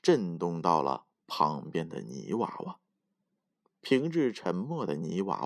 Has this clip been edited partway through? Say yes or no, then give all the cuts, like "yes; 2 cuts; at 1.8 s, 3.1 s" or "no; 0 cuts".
no; 0 cuts